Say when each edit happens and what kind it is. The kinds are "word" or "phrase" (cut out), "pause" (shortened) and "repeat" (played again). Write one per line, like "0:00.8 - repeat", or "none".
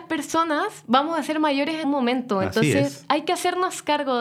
0:01.8 - word